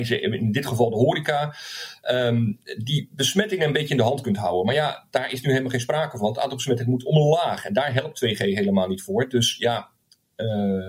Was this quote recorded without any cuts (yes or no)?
yes